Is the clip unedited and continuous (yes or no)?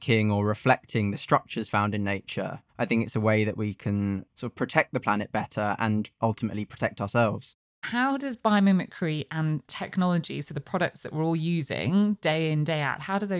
no